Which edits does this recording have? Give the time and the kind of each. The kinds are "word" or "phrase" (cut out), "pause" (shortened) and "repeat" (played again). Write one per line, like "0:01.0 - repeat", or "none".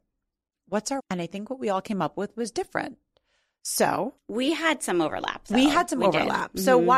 0:01.0 - word
0:04.2 - pause